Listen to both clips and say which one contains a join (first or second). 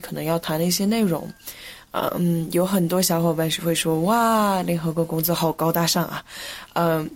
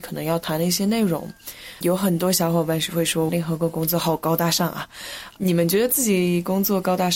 second